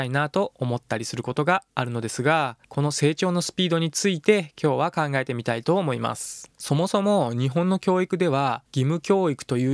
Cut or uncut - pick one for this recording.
cut